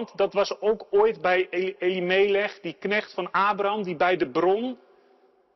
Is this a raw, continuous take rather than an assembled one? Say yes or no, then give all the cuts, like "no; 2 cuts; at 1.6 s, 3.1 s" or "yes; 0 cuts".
yes; 0 cuts